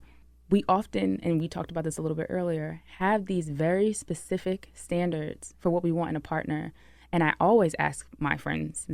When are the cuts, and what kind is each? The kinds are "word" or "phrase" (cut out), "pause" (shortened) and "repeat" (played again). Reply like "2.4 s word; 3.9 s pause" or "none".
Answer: none

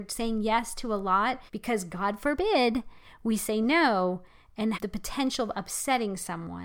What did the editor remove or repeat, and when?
1.5 s pause; 4.7 s word

